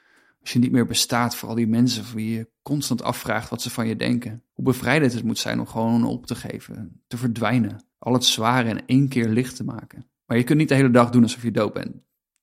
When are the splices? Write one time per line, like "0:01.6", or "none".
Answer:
0:04.5
0:07.9
0:10.2